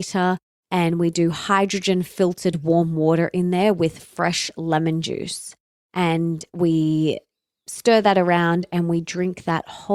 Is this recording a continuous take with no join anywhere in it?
yes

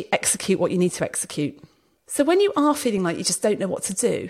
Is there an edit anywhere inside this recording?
no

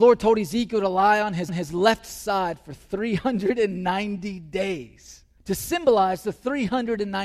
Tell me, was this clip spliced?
yes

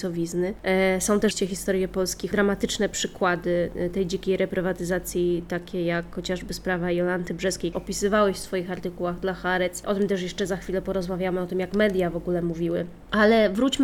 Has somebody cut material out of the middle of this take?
yes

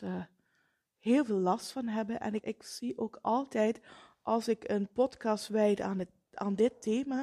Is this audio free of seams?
no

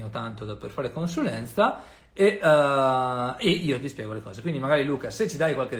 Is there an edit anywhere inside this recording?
no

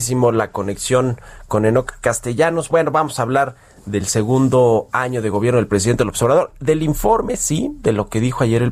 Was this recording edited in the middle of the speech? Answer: no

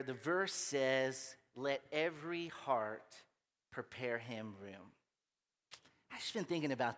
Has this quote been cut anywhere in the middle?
no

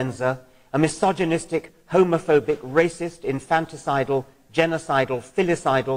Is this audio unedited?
yes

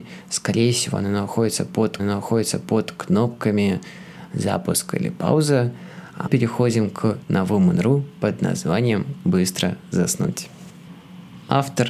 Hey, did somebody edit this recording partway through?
yes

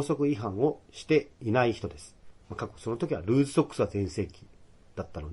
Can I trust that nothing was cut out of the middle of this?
no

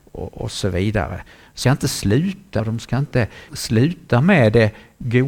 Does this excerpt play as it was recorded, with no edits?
no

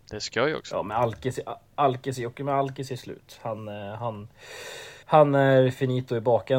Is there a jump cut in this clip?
yes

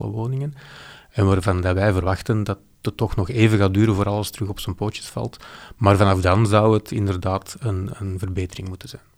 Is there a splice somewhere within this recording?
no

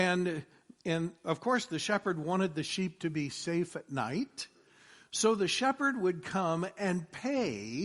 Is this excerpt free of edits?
yes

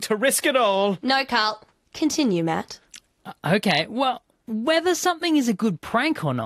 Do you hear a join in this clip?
no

